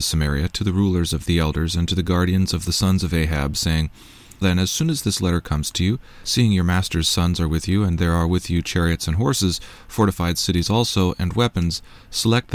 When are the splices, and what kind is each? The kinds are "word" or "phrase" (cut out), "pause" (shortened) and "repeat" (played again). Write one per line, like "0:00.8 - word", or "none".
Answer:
0:01.3 - phrase
0:04.4 - word